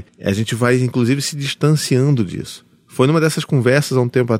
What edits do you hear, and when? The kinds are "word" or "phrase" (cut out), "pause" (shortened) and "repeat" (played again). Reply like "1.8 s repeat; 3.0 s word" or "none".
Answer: none